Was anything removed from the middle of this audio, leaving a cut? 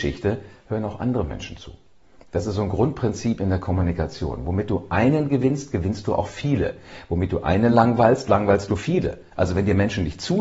no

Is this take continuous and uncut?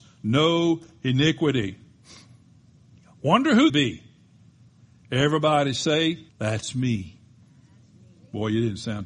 no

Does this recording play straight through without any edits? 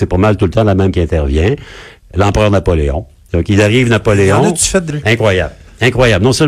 no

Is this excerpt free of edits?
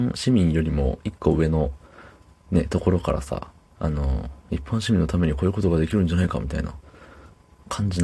yes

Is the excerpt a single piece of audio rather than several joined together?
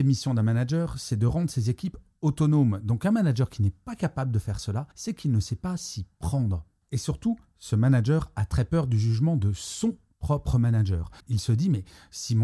no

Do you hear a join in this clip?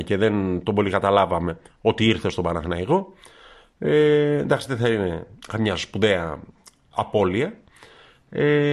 no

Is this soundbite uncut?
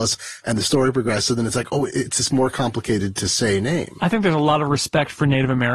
yes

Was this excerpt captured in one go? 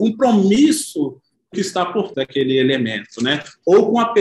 no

